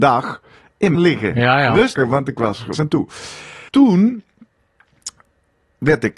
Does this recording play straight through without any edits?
no; 4 cuts; at 0.9 s, 2.0 s, 2.7 s, 3.7 s

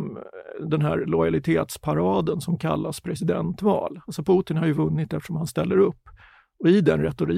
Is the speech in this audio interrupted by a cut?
no; 0 cuts

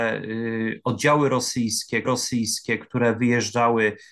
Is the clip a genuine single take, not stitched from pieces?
no; 1 cut; at 2.0 s

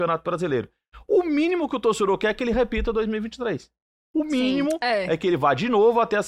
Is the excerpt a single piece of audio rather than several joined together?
yes; 0 cuts

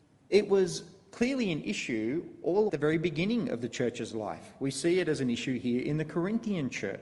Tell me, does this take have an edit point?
yes; 1 cut; at 2.7 s

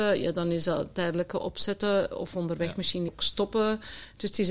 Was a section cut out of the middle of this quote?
yes; 1 cut; at 3.1 s

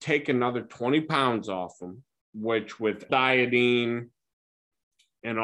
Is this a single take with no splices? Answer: no; 1 cut; at 3.1 s

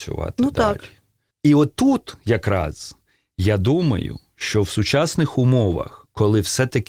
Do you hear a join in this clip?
no; 0 cuts

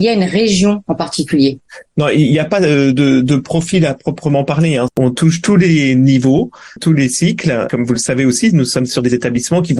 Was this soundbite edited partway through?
no; 0 cuts

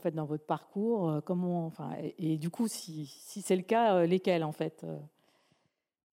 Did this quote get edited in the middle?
no; 0 cuts

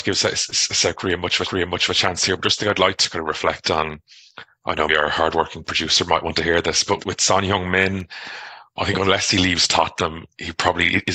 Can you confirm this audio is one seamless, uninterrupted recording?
no; 3 cuts; at 1.4 s, 4.9 s, 7.0 s

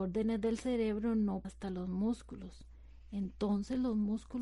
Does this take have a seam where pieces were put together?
yes; 1 cut; at 1.4 s

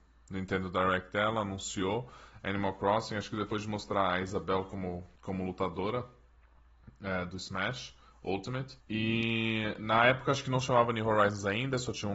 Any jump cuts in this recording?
yes; 2 cuts; at 5.2 s, 8.8 s

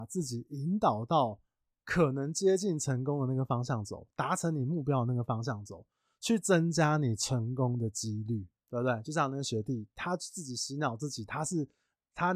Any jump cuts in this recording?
yes; 1 cut; at 8.6 s

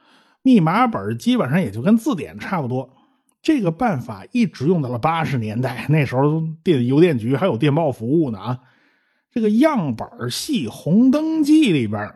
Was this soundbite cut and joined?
no; 0 cuts

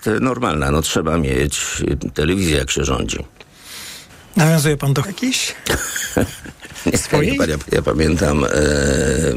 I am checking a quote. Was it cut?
yes; 4 cuts; at 2.1 s, 4.1 s, 5.0 s, 7.6 s

